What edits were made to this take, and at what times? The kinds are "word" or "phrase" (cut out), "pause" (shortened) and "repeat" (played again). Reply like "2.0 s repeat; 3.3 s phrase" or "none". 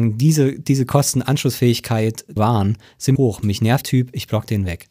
2.4 s word; 3.2 s phrase; 3.8 s word